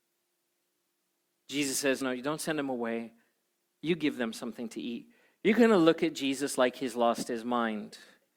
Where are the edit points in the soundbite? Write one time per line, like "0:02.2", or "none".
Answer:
0:02.0